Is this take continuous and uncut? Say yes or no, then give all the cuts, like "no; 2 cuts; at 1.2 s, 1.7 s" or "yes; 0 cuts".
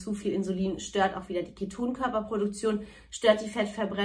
yes; 0 cuts